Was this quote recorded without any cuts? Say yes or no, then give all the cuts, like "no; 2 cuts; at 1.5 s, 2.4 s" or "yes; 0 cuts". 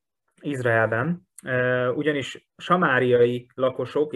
yes; 0 cuts